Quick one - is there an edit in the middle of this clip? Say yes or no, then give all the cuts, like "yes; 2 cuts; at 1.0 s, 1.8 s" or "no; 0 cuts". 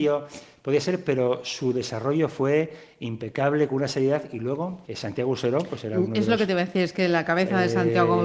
yes; 1 cut; at 4.9 s